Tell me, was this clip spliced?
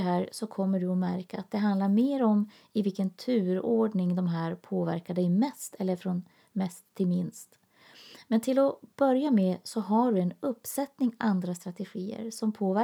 no; 0 cuts

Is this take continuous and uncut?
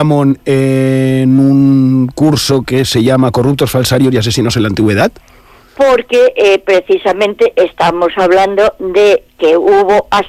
yes; 0 cuts

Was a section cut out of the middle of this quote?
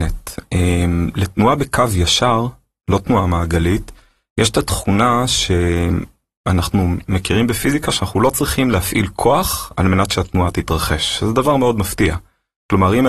no; 0 cuts

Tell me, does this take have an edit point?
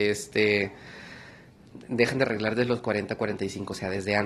no; 0 cuts

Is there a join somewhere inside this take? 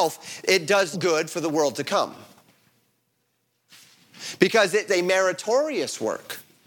yes; 2 cuts; at 0.9 s, 4.9 s

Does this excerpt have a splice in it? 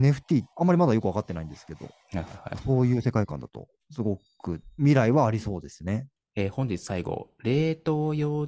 no; 0 cuts

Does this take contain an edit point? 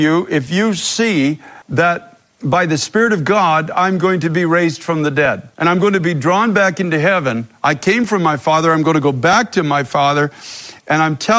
yes; 2 cuts; at 1.6 s, 5.5 s

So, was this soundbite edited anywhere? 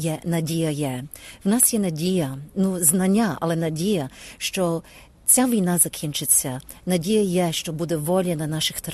no; 0 cuts

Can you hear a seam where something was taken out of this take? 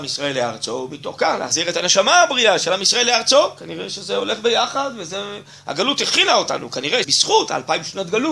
yes; 1 cut; at 7.0 s

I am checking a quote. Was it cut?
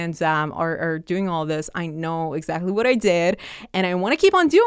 no; 0 cuts

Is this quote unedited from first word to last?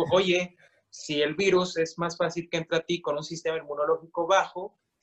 yes; 0 cuts

